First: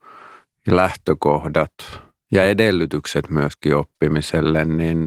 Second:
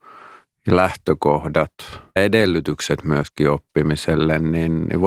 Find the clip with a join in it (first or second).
second